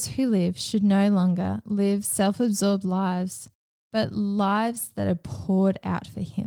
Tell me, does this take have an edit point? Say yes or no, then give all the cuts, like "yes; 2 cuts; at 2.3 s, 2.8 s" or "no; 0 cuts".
no; 0 cuts